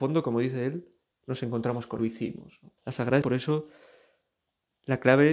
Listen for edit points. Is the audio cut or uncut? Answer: cut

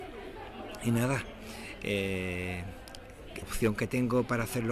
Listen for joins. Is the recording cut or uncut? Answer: cut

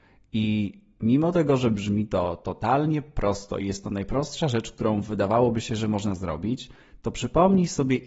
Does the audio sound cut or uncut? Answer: uncut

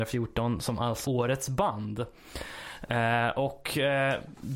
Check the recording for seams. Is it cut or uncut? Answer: cut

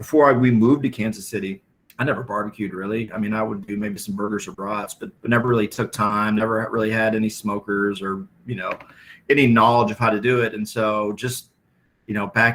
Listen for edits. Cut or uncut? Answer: cut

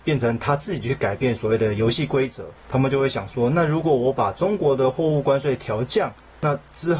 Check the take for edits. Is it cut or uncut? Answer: cut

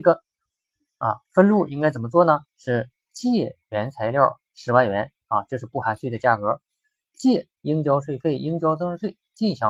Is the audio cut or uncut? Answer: cut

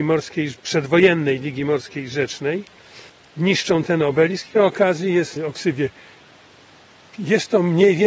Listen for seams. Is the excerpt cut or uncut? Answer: cut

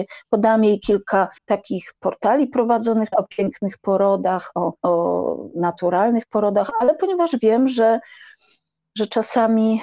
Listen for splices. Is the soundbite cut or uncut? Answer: cut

